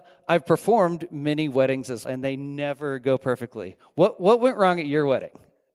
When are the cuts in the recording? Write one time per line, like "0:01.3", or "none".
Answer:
0:02.0